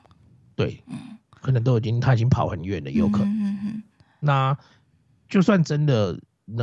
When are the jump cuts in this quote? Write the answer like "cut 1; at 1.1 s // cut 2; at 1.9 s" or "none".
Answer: none